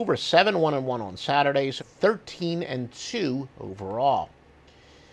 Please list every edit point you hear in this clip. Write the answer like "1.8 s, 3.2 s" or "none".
1.8 s, 3.5 s